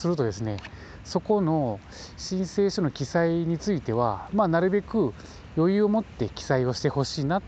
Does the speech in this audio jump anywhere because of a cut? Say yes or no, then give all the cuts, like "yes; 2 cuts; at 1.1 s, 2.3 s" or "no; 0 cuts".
no; 0 cuts